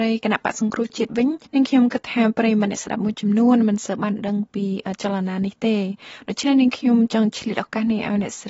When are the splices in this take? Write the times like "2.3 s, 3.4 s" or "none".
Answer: 1.4 s